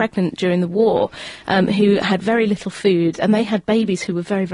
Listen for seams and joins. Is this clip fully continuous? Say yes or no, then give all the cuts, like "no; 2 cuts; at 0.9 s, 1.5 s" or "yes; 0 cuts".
yes; 0 cuts